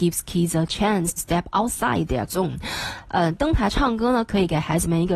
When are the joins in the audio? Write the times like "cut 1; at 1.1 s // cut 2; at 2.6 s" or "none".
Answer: cut 1; at 1.2 s // cut 2; at 2.3 s